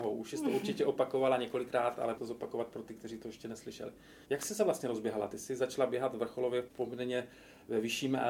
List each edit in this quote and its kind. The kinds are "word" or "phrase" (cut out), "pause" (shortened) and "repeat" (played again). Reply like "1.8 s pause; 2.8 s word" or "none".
2.2 s word; 4.2 s pause; 6.7 s word